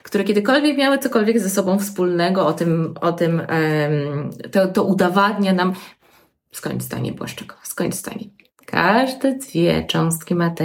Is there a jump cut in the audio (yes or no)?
no